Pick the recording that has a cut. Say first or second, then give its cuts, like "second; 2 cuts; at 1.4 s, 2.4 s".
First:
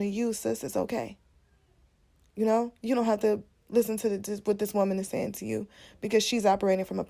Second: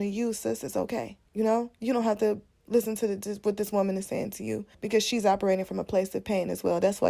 second; 2 cuts; at 1.3 s, 4.7 s